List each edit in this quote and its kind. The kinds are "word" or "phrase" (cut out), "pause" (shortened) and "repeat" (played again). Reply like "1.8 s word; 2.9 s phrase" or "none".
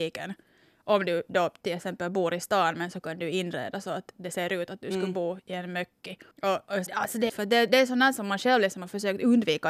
6.3 s pause; 6.9 s phrase; 7.3 s word